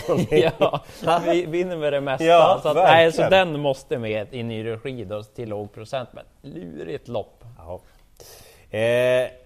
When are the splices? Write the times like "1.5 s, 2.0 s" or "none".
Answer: none